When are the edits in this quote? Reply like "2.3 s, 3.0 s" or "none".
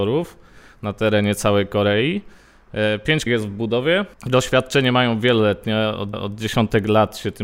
3.3 s, 6.1 s